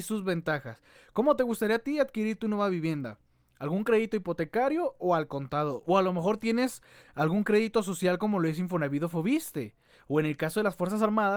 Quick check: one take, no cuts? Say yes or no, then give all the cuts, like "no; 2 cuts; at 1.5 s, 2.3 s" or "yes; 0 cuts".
yes; 0 cuts